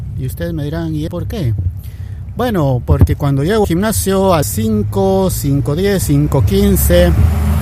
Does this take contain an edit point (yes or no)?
yes